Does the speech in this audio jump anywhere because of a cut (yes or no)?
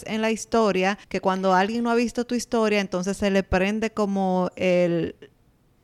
yes